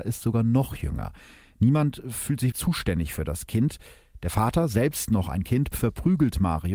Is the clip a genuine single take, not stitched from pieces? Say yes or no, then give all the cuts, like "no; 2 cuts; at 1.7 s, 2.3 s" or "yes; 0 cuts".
no; 1 cut; at 2.5 s